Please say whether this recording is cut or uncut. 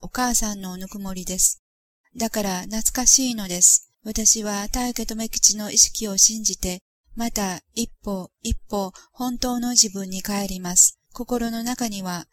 cut